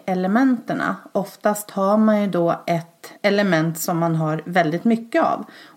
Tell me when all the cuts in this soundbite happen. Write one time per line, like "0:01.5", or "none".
0:03.2